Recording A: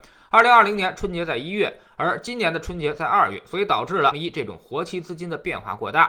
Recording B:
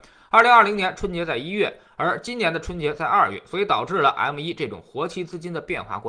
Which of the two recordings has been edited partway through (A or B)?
A